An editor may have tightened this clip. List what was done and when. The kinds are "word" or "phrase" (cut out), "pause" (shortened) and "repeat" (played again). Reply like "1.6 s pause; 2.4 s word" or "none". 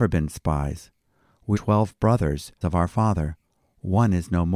1.5 s word; 2.6 s word